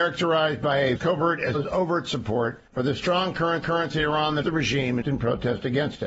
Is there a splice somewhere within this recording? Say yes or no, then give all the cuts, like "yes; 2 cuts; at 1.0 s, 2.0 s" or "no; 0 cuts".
yes; 6 cuts; at 1.0 s, 1.5 s, 2.7 s, 3.6 s, 4.4 s, 5.0 s